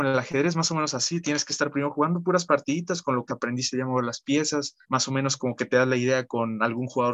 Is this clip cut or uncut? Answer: cut